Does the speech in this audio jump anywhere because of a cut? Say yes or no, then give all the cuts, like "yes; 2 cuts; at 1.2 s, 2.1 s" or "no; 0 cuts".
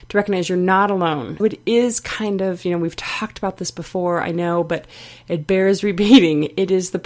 yes; 1 cut; at 1.4 s